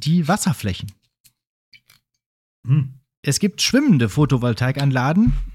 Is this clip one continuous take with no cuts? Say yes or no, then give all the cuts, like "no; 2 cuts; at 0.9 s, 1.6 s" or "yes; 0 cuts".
yes; 0 cuts